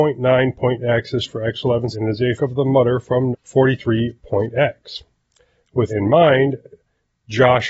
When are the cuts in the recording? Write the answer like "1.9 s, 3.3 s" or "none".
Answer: 1.2 s, 1.9 s, 2.4 s, 3.3 s, 5.9 s